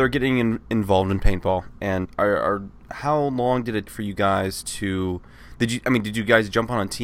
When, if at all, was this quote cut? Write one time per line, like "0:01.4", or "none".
0:02.0
0:03.9